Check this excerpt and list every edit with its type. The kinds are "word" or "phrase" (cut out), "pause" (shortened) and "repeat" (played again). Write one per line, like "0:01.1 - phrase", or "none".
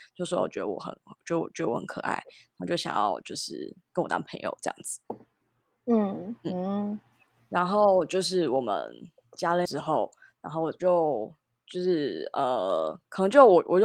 0:09.7 - word

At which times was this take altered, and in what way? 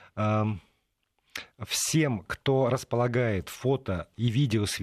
none

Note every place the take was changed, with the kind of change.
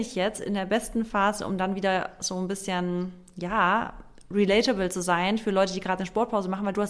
none

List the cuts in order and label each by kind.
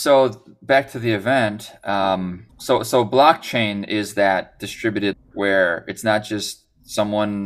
0:02.5 - pause
0:05.1 - word

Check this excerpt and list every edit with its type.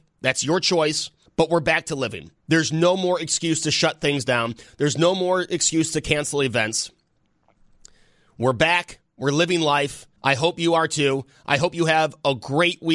0:01.3 - pause
0:02.4 - pause
0:10.2 - pause

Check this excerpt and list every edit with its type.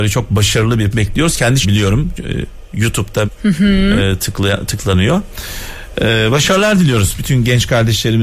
0:00.9 - word
0:01.6 - phrase
0:03.2 - word

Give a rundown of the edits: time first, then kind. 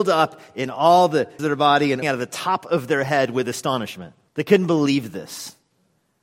0:01.4 - word
0:02.0 - word
0:04.3 - pause

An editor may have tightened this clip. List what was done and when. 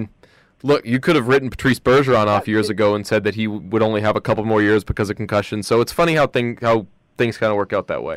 none

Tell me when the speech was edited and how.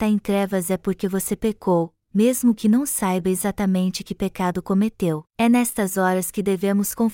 0:05.3 - pause

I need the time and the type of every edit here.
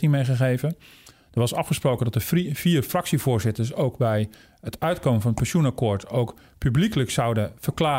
none

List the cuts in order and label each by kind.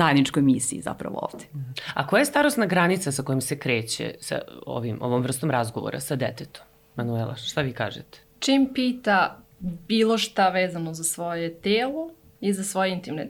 none

